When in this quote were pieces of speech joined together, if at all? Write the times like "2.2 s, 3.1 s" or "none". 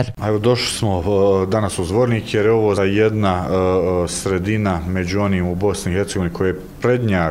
2.8 s